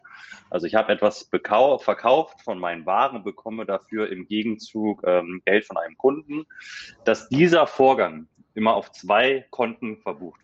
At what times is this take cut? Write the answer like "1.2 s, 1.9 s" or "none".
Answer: none

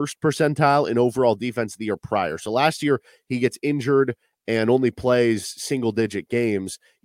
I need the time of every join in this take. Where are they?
none

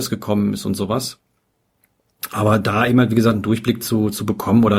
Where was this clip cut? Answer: none

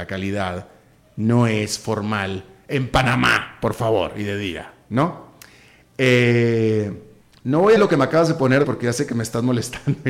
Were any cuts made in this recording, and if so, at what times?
7.2 s, 7.8 s, 8.6 s

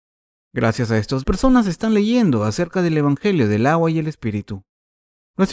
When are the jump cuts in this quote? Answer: 1.2 s

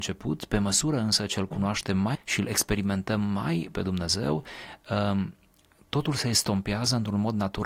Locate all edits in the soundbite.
2.1 s, 3.7 s

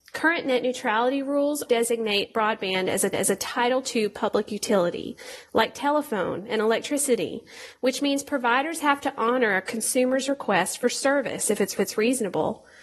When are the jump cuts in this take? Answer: 1.7 s, 3.1 s, 11.8 s

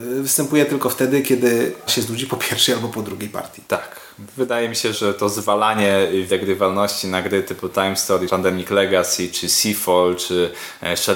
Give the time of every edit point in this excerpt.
1.9 s, 3.7 s, 4.9 s, 6.3 s, 8.3 s

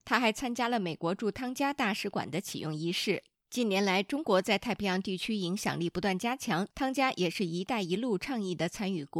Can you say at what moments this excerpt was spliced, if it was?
6.7 s

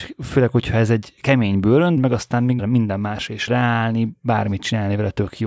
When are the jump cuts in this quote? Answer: 2.0 s, 2.6 s, 3.5 s

